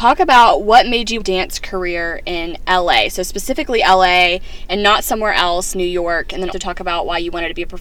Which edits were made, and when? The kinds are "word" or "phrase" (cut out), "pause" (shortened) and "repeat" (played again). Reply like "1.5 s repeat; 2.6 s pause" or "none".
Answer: 1.2 s phrase; 5.7 s word; 6.5 s word